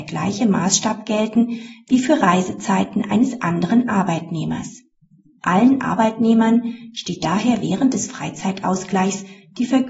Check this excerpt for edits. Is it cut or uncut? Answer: uncut